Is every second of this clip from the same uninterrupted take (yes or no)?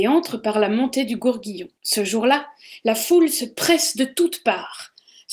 no